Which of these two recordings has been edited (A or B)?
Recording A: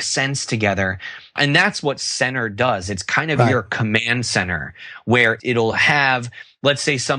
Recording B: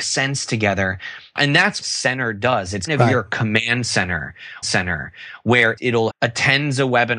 B